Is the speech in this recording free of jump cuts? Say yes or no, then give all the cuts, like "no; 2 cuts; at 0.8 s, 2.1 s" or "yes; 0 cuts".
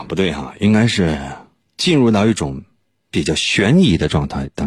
yes; 0 cuts